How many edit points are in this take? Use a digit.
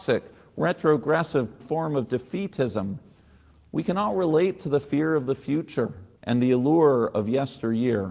2